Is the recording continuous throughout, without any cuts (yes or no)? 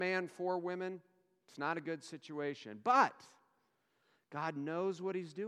yes